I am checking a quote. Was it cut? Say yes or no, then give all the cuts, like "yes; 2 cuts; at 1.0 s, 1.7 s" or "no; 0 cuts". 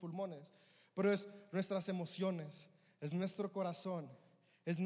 no; 0 cuts